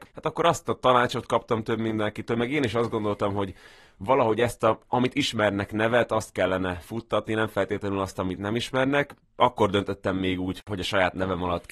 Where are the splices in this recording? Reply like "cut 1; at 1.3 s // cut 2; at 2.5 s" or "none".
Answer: none